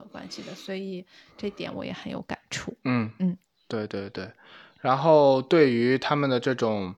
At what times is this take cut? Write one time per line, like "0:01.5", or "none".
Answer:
none

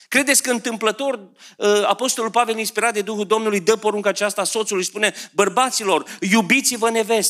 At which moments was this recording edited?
none

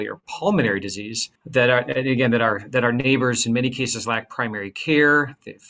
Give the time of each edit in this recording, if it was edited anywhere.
0:01.4

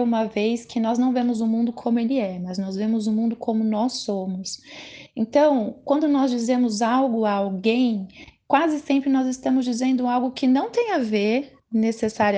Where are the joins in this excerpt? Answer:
none

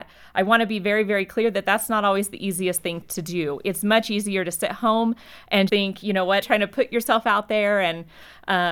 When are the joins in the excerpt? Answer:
0:03.0
0:05.7
0:06.4

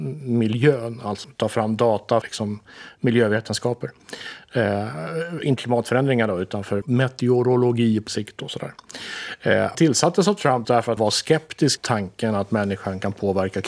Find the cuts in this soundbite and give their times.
0:01.2
0:02.2
0:05.6
0:06.8
0:08.1
0:09.7
0:10.6
0:11.0
0:11.8

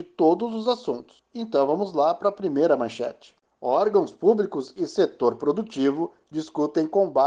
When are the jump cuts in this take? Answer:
none

